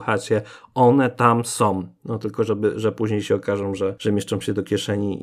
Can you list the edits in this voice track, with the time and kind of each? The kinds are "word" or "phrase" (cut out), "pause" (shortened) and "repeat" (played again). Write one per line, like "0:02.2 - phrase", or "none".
none